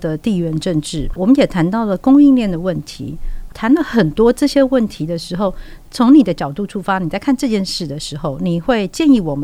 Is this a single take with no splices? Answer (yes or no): no